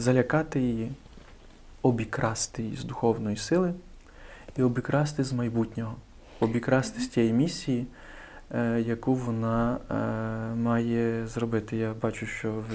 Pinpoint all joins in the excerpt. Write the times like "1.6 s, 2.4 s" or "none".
none